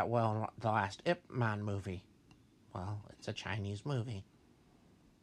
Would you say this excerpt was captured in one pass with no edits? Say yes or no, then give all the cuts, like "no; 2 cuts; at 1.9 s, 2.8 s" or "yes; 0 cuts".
yes; 0 cuts